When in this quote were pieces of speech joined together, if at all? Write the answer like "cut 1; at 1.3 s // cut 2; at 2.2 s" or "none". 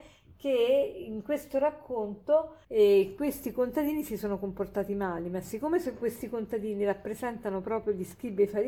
cut 1; at 2.6 s